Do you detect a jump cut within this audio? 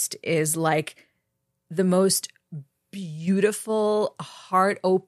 no; 0 cuts

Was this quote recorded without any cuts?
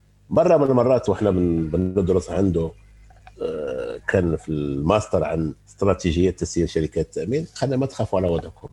no; 1 cut; at 5.6 s

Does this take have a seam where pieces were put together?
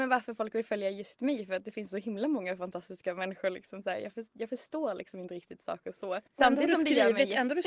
yes; 1 cut; at 6.3 s

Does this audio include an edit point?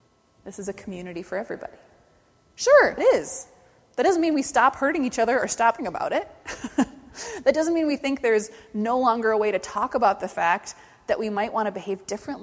yes; 2 cuts; at 3.0 s, 5.8 s

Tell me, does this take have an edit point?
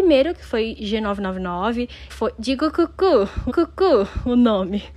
yes; 2 cuts; at 2.1 s, 3.5 s

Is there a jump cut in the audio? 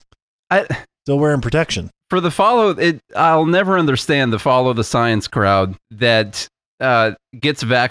yes; 1 cut; at 5.8 s

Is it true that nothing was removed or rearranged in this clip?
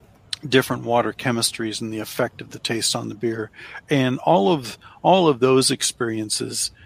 yes; 0 cuts

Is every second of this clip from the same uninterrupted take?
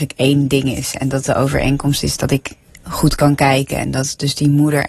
yes; 0 cuts

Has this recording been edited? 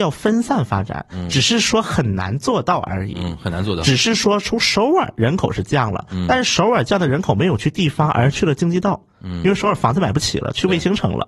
no; 0 cuts

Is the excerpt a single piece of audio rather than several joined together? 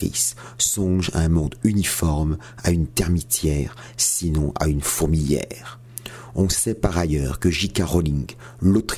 yes; 0 cuts

